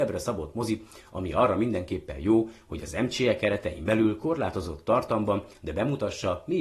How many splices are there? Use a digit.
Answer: 0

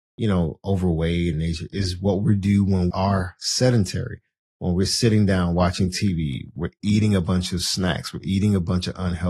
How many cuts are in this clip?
2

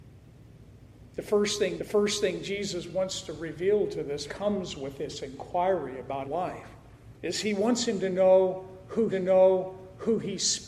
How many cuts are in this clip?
5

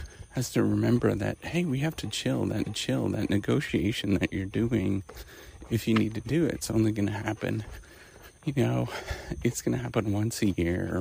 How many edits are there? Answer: 2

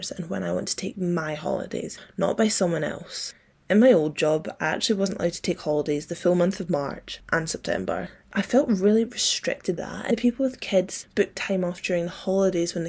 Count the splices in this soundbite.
2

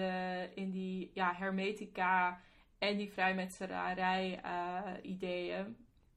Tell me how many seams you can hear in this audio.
0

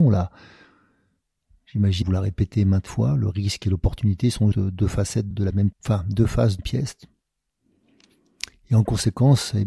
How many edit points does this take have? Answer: 6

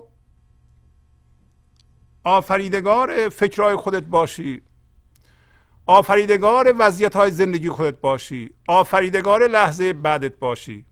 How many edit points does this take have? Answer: 0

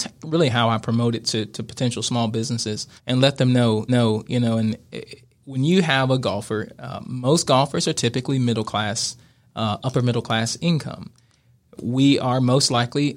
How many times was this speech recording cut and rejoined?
2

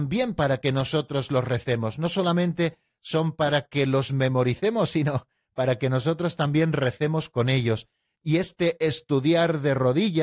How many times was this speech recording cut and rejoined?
0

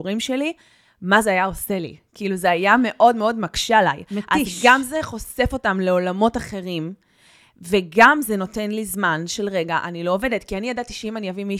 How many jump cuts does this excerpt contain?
0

